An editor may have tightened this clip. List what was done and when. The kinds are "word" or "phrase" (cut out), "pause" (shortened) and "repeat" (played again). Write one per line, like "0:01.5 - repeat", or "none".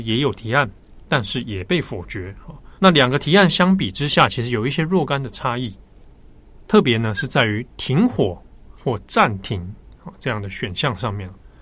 0:02.8 - pause
0:08.8 - pause